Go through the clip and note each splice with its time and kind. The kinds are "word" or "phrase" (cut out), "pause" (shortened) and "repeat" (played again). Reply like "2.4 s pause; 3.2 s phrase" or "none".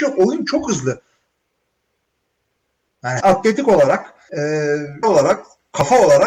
3.2 s word; 4.3 s word; 5.0 s word